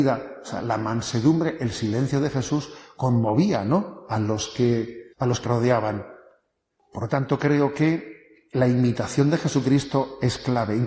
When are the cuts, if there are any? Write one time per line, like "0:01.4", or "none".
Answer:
0:05.1
0:05.4
0:08.5